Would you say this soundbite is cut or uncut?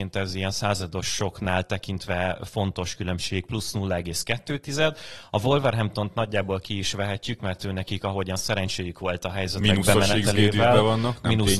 uncut